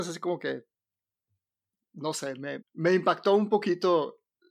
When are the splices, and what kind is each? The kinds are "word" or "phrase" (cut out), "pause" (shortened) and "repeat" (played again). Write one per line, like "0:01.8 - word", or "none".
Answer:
0:02.6 - word